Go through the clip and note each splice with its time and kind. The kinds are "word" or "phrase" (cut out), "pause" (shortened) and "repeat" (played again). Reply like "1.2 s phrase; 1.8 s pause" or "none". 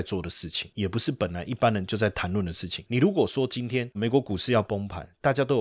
3.9 s word